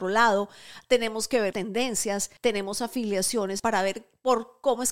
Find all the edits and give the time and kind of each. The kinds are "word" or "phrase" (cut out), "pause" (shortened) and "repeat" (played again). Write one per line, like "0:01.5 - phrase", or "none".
0:01.5 - word
0:02.4 - pause
0:03.6 - phrase